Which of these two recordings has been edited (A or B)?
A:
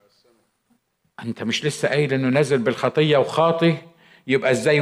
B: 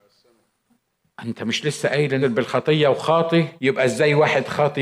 B